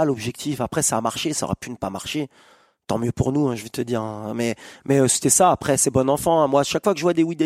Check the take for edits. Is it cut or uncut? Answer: uncut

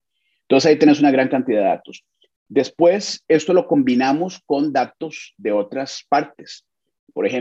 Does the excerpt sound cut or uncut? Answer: uncut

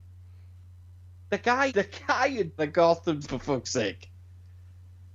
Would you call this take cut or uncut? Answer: cut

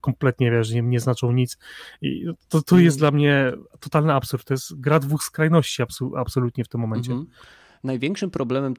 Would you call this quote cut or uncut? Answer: uncut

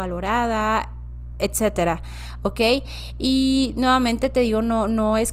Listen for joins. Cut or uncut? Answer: uncut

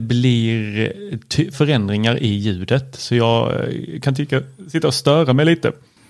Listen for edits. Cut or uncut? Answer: cut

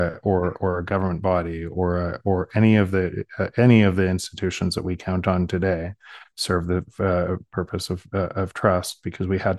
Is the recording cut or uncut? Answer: uncut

